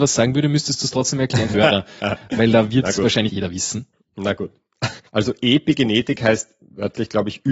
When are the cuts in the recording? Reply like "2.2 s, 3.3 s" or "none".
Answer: 1.5 s, 3.3 s, 5.1 s